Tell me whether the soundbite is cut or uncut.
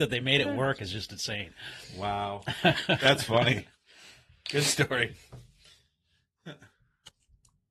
uncut